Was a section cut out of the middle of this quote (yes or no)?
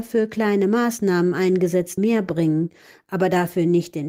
yes